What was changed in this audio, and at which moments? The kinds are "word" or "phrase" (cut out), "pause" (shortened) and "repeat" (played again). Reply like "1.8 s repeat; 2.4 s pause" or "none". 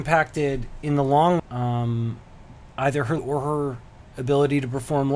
1.4 s word; 3.2 s word